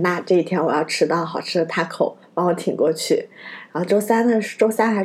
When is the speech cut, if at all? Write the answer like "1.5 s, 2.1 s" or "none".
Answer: none